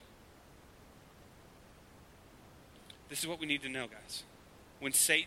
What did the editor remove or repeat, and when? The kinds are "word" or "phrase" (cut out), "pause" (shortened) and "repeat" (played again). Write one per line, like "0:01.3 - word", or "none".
0:03.0 - pause